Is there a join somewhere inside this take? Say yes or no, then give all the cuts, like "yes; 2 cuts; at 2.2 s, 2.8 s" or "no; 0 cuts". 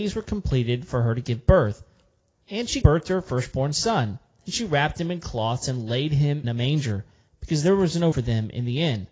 yes; 3 cuts; at 2.8 s, 6.4 s, 8.1 s